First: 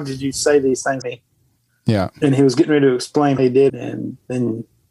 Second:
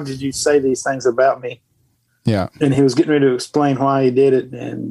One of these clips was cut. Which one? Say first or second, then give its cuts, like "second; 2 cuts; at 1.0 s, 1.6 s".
first; 3 cuts; at 1.0 s, 3.4 s, 3.7 s